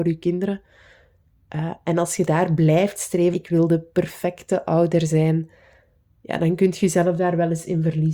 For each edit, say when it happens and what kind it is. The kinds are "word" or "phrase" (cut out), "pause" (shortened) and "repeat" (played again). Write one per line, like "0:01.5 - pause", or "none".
0:03.3 - word